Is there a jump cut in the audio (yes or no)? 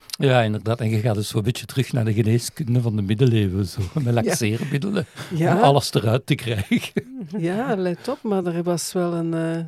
no